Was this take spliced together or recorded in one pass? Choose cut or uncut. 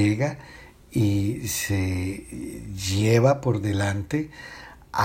uncut